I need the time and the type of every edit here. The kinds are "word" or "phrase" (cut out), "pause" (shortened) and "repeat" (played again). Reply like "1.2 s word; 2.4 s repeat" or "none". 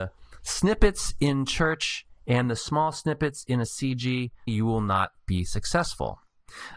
4.5 s word